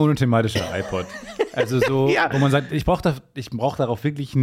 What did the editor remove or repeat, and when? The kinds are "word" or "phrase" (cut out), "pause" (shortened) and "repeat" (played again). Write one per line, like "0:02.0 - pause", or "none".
none

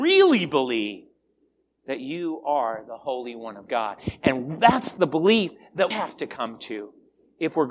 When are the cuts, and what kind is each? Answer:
0:05.9 - word

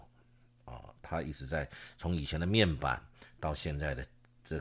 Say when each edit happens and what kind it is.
none

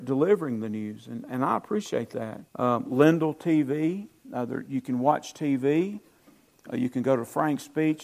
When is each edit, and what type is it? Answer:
0:02.5 - pause

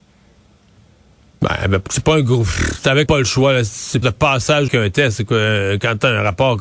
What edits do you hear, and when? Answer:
0:01.9 - word
0:03.1 - word
0:04.0 - phrase
0:04.7 - word

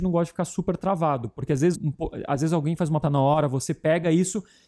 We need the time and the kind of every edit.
0:01.7 - word
0:03.0 - word

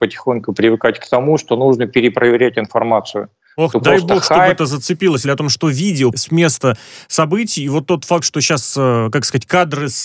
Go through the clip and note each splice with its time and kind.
0:05.2 - phrase
0:06.1 - word

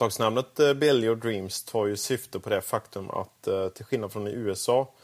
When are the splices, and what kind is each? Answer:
none

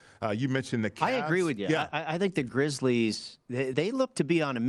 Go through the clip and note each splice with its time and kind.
0:03.7 - word

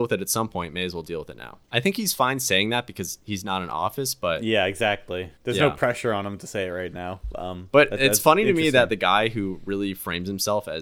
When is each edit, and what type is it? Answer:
0:01.6 - pause
0:05.4 - pause

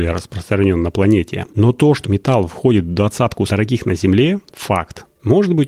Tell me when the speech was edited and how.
0:02.0 - word
0:03.5 - word

